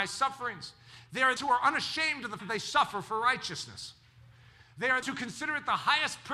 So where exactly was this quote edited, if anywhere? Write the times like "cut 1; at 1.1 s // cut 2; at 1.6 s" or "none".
cut 1; at 1.4 s // cut 2; at 2.4 s // cut 3; at 5.0 s